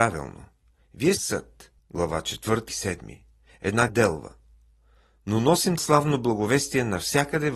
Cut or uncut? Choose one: cut